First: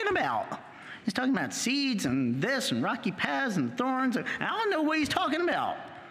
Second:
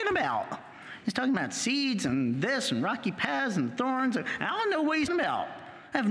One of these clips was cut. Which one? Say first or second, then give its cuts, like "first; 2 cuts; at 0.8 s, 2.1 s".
second; 1 cut; at 5.1 s